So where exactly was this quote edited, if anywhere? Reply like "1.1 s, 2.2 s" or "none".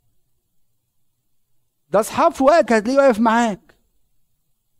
2.7 s